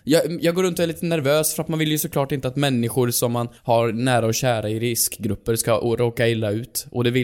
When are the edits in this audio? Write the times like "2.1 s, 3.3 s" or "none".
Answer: 3.6 s